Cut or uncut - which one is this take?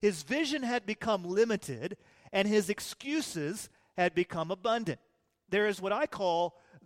uncut